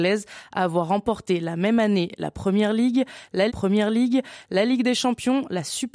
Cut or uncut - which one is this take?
cut